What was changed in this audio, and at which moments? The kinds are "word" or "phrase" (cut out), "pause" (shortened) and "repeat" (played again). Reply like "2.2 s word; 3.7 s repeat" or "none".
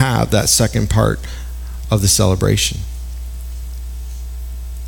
none